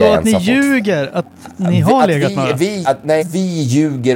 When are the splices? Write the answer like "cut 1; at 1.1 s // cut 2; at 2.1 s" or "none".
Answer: cut 1; at 2.8 s // cut 2; at 3.2 s